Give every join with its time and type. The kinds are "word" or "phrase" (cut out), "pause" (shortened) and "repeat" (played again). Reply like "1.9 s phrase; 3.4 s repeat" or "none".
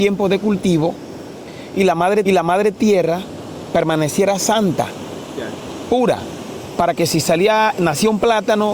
2.2 s repeat